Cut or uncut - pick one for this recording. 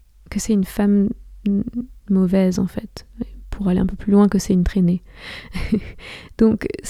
cut